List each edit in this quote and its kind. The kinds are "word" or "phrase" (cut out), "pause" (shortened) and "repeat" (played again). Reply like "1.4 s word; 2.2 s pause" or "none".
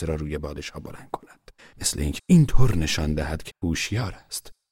1.6 s pause; 2.2 s word; 3.5 s word